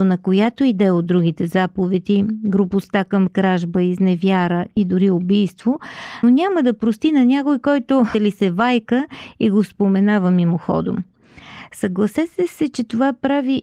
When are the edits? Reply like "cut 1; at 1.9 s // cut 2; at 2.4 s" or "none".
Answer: cut 1; at 3.3 s // cut 2; at 6.2 s // cut 3; at 8.1 s